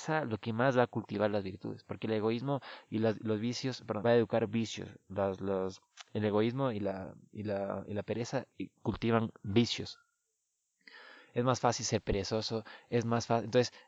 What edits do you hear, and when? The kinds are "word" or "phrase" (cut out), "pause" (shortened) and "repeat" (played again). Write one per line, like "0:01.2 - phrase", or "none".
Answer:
0:04.0 - phrase

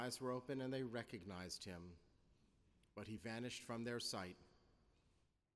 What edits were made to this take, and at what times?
none

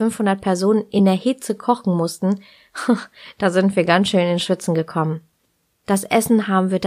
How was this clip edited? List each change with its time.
none

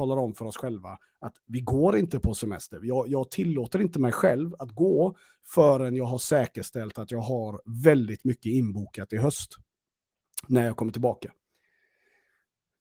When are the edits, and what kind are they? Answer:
none

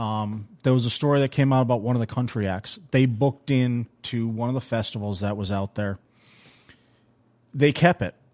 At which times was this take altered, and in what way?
none

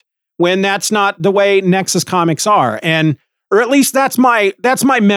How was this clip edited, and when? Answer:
none

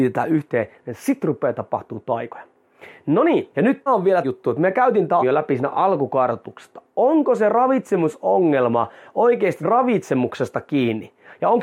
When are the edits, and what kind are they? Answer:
0:03.5 - pause
0:03.9 - word
0:04.2 - word
0:05.2 - word
0:09.6 - word

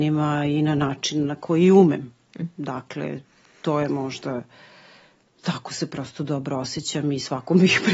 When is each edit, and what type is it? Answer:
none

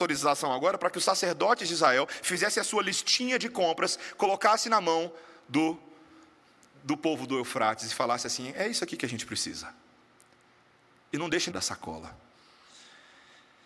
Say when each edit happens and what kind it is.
0:11.5 - phrase

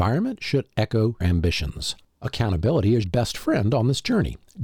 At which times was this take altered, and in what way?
0:01.2 - word
0:03.0 - word

